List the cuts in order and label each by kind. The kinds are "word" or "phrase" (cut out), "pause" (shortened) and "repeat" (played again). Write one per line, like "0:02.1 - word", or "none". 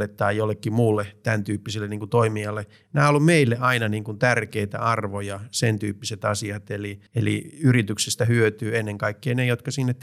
0:07.1 - pause

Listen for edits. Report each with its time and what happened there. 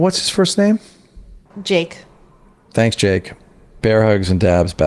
none

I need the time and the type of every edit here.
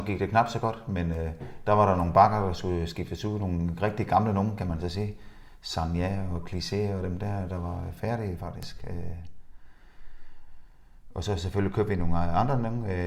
none

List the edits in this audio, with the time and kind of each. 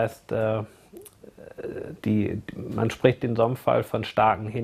none

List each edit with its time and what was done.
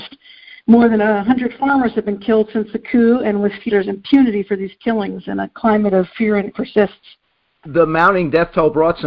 0:03.7 - word
0:06.5 - word

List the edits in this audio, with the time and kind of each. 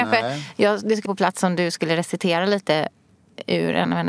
0:01.1 - word

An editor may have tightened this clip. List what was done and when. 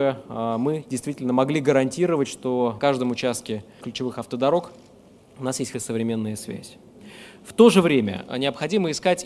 0:02.8 - word
0:03.8 - word
0:05.7 - word

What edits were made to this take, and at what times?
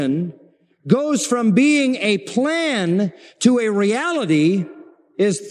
none

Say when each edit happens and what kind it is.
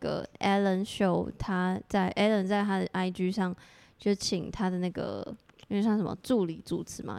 none

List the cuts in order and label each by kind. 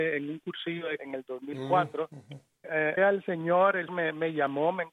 0:01.0 - word
0:02.6 - word
0:03.0 - word
0:03.9 - word

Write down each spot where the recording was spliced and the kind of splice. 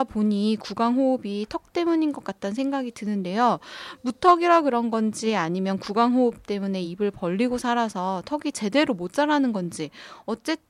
none

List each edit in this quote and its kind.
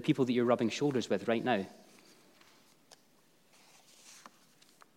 none

